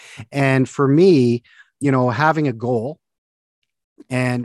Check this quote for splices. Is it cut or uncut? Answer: uncut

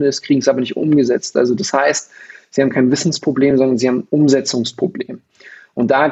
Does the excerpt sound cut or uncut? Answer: uncut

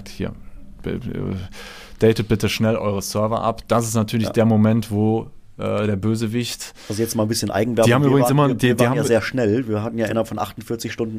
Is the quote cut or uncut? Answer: uncut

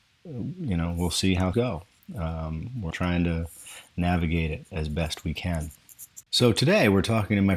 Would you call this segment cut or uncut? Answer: cut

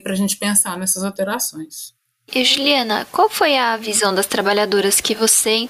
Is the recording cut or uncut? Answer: uncut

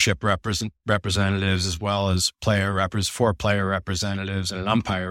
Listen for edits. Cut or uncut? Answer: uncut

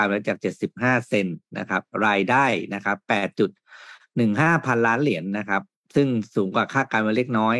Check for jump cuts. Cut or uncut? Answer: cut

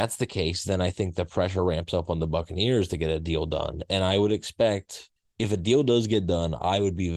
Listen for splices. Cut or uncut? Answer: cut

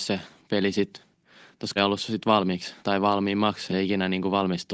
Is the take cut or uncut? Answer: cut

